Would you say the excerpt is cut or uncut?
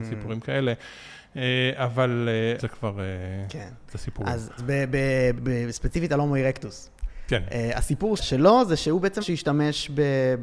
cut